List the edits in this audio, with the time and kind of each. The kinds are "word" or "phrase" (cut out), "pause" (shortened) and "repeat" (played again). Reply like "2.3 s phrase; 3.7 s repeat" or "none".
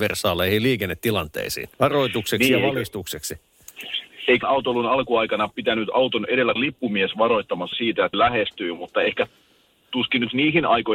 1.7 s pause; 4.4 s word; 6.6 s word; 7.7 s word; 8.1 s word